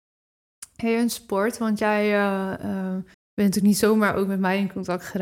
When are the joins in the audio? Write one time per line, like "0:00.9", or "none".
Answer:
0:03.1